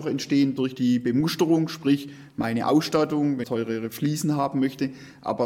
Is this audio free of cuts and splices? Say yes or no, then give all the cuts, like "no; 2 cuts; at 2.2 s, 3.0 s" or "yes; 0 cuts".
no; 1 cut; at 3.4 s